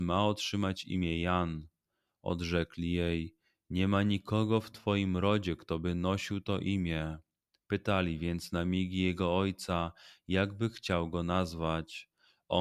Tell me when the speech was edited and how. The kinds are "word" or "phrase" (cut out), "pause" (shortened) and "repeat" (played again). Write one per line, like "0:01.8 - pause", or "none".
none